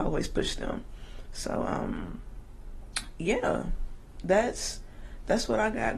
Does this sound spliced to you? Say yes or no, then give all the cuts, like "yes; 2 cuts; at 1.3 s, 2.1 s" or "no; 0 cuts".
no; 0 cuts